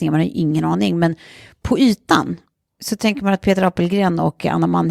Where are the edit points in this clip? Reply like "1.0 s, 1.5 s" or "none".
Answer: none

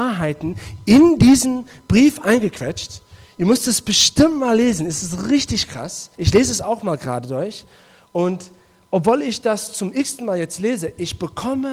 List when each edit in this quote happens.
6.1 s

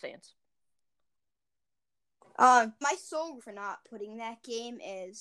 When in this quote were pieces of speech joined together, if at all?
2.8 s, 3.4 s

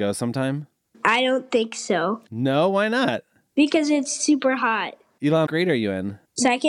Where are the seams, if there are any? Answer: 5.5 s

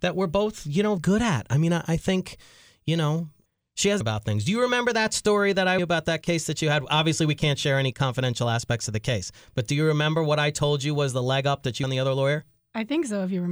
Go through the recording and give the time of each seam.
1.0 s, 4.0 s, 5.8 s, 11.8 s

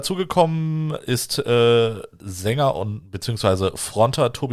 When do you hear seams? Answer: none

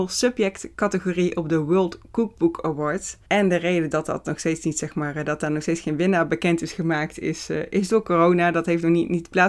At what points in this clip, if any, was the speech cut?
3.2 s

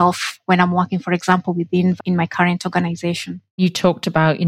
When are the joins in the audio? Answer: 2.0 s, 3.5 s

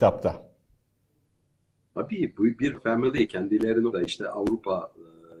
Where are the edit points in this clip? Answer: 2.7 s, 3.9 s

